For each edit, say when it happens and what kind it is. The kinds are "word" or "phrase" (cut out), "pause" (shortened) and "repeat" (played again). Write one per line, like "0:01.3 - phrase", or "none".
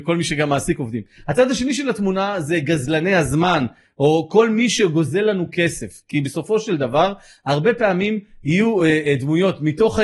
none